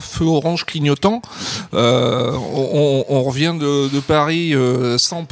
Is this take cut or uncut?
uncut